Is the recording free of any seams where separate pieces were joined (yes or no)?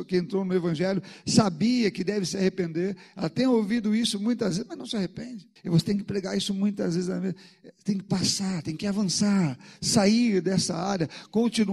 no